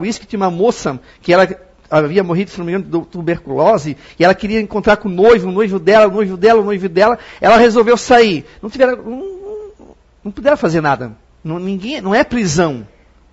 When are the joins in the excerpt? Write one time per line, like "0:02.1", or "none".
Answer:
none